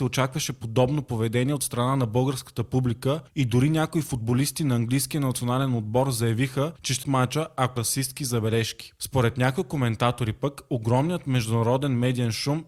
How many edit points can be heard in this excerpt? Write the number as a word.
two